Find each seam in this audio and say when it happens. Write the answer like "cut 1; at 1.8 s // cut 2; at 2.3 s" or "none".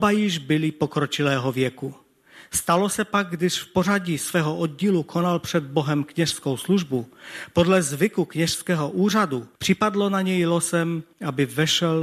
cut 1; at 9.5 s // cut 2; at 11.1 s